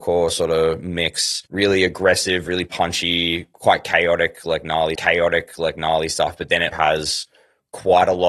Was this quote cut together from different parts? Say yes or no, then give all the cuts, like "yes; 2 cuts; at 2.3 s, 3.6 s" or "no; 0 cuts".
yes; 3 cuts; at 1.5 s, 5.0 s, 6.7 s